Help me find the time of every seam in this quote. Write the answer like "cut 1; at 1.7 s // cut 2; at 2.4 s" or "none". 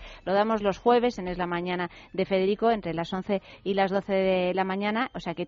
none